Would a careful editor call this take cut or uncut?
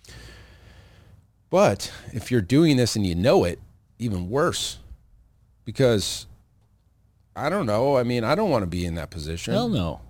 uncut